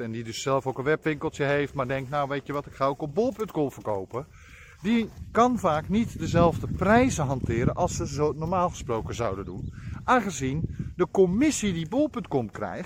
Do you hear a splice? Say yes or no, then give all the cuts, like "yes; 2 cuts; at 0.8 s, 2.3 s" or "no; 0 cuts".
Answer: no; 0 cuts